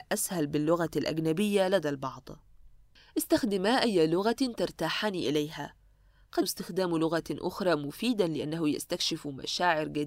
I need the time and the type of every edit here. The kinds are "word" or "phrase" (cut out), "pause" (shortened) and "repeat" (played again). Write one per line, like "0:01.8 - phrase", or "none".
0:06.4 - word